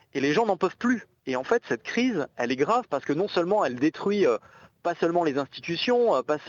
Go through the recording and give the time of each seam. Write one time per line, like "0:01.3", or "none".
none